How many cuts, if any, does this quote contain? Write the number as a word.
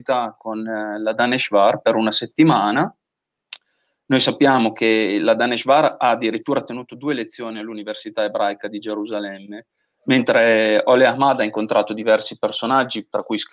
zero